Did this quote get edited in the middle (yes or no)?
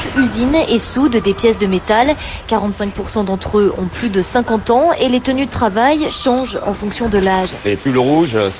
no